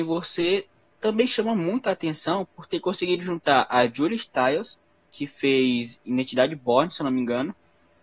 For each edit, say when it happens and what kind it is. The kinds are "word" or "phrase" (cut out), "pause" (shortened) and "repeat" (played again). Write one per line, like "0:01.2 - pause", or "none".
none